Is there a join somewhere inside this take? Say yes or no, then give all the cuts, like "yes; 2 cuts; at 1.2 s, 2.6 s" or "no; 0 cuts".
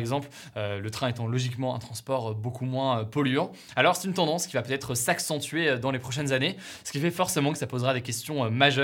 no; 0 cuts